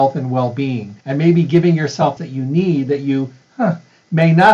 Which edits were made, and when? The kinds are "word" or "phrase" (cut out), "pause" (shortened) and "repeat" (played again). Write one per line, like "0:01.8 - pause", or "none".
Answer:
0:01.0 - pause
0:02.2 - phrase

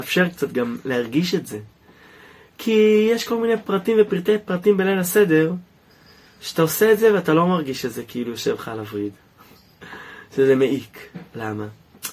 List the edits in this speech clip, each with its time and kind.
none

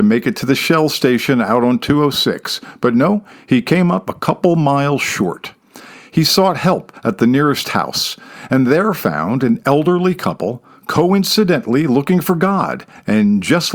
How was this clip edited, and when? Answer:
none

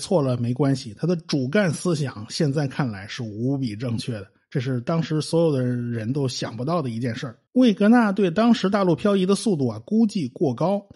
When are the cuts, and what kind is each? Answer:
0:07.5 - pause

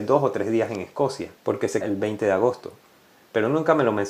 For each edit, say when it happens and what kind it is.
0:01.4 - pause
0:01.8 - word

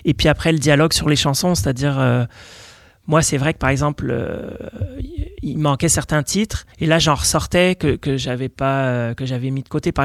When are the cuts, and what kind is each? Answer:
0:06.7 - pause

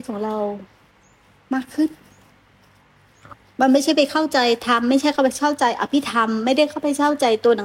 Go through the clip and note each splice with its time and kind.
none

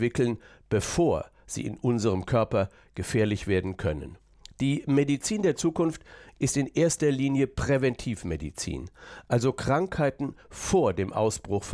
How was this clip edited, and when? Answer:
none

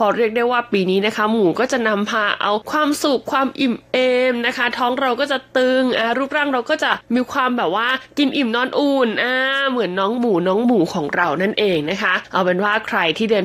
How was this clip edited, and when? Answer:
none

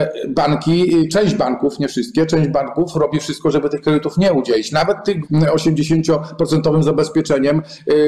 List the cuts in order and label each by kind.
0:05.2 - word

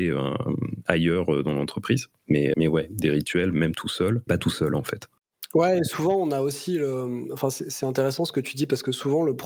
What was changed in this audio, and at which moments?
0:02.5 - word
0:04.3 - word

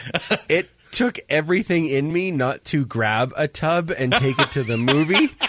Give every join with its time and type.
none

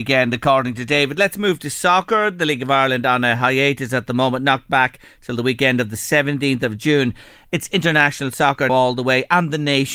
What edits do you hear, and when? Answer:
0:08.7 - word

